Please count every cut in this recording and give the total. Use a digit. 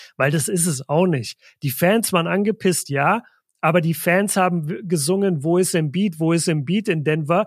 0